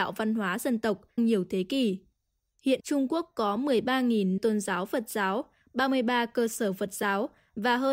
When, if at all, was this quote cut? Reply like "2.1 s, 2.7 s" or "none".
1.2 s, 2.8 s, 4.4 s